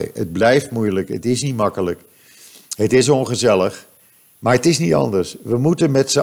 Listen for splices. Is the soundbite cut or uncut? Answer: uncut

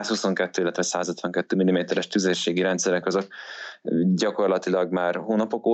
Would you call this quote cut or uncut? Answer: uncut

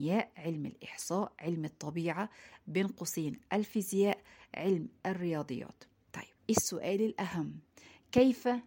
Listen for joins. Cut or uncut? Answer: cut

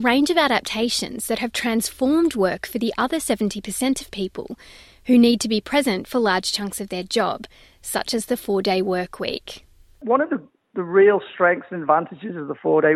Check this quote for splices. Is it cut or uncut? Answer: uncut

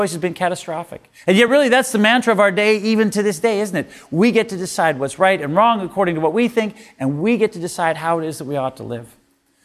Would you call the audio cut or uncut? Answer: uncut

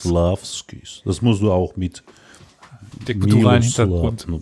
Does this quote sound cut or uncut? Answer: uncut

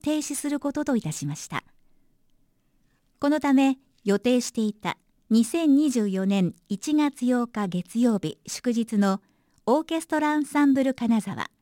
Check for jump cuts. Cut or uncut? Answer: cut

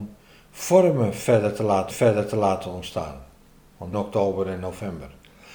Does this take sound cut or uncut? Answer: cut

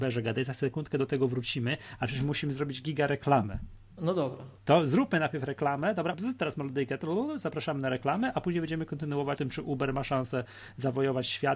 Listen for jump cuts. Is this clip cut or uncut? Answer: cut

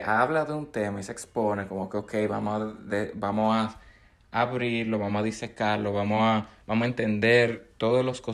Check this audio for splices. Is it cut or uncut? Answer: uncut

